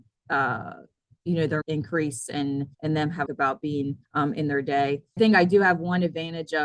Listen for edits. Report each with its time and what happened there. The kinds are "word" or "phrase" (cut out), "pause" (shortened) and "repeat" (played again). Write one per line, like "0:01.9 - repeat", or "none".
0:01.6 - phrase
0:02.7 - pause
0:03.3 - phrase
0:04.0 - pause
0:05.2 - word